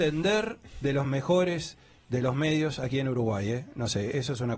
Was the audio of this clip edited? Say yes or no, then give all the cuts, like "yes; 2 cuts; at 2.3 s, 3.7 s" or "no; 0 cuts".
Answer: no; 0 cuts